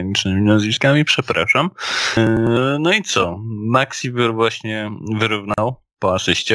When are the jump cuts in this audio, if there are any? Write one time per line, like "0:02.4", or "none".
none